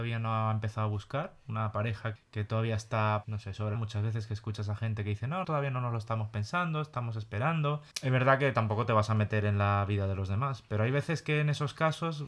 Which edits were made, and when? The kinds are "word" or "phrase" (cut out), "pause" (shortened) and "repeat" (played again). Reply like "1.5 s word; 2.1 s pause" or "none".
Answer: 2.2 s word; 3.2 s word; 3.7 s phrase; 5.4 s word; 7.9 s pause